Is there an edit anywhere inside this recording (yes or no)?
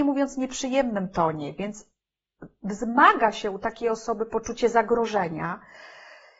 no